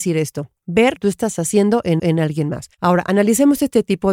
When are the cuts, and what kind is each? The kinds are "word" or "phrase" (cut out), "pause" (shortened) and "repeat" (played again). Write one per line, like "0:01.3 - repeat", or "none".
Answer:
0:01.0 - phrase
0:02.0 - repeat
0:02.7 - pause